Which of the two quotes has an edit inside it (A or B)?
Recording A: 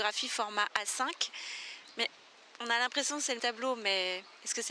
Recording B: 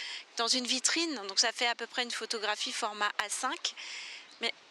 A